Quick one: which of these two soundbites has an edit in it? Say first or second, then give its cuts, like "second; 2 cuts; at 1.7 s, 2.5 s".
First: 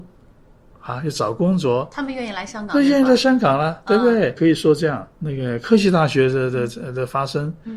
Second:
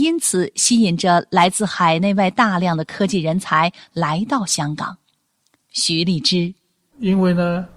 first; 1 cut; at 5.1 s